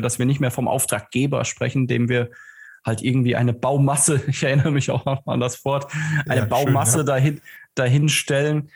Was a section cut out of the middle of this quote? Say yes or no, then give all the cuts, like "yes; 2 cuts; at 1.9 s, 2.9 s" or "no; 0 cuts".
no; 0 cuts